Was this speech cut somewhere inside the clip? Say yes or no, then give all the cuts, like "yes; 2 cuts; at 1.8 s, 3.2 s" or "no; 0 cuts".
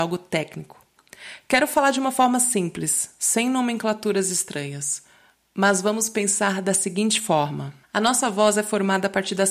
yes; 1 cut; at 7.8 s